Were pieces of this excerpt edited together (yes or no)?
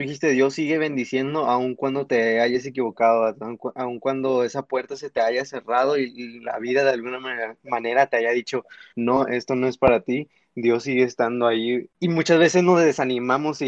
no